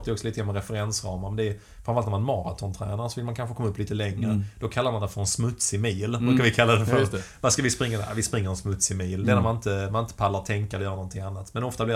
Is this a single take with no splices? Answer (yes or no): yes